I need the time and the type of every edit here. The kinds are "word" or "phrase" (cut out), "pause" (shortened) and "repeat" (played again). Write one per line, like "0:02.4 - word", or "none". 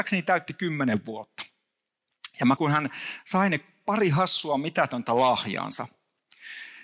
0:02.6 - word